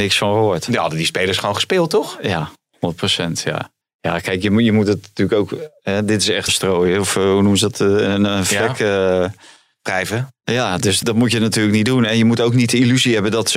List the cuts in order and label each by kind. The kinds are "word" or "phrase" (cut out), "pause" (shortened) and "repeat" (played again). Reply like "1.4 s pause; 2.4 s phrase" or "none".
3.8 s pause; 6.5 s phrase; 11.0 s word